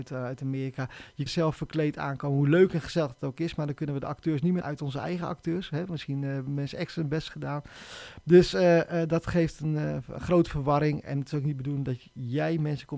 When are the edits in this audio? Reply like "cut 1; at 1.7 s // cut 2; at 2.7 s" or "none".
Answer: cut 1; at 1.3 s // cut 2; at 4.6 s